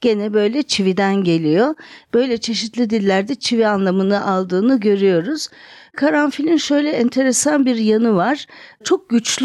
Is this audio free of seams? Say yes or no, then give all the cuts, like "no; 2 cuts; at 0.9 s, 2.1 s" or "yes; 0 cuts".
yes; 0 cuts